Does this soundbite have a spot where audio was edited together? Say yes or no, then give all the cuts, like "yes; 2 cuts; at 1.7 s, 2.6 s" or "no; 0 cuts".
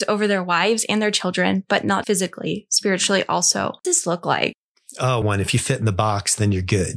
yes; 3 cuts; at 2.0 s, 3.8 s, 5.2 s